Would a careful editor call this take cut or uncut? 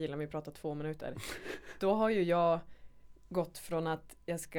uncut